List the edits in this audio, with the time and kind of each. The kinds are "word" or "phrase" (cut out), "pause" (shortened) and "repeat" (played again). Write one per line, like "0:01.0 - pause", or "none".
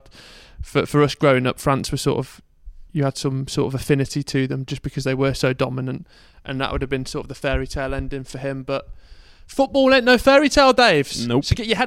none

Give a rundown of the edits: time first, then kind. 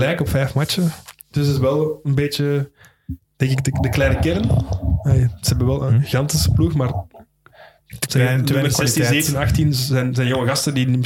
none

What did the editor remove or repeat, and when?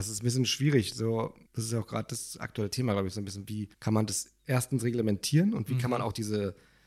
0:01.4 - pause
0:03.7 - pause

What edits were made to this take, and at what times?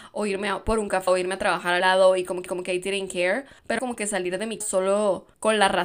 0:01.1 - word
0:01.8 - word
0:02.5 - repeat
0:03.8 - word
0:04.6 - word

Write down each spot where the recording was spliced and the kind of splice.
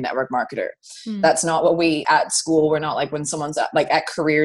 0:02.0 - word

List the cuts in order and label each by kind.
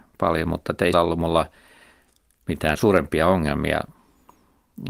0:00.9 - word
0:02.7 - word

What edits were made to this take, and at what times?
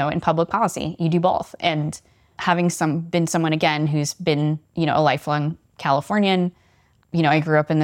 none

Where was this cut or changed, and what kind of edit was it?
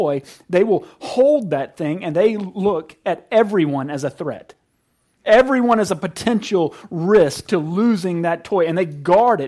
none

